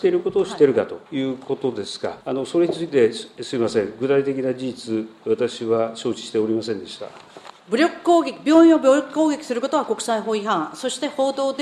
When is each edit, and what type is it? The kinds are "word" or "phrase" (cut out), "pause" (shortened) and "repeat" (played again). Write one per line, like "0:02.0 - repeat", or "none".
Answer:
0:01.1 - pause
0:02.2 - pause
0:07.6 - pause